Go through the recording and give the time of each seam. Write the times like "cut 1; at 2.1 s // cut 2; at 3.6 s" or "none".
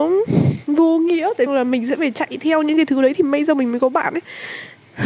cut 1; at 1.5 s